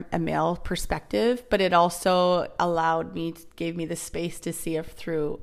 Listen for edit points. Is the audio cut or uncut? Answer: uncut